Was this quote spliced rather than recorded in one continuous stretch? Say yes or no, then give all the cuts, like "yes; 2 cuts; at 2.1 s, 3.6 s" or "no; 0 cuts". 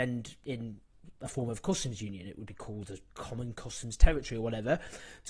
no; 0 cuts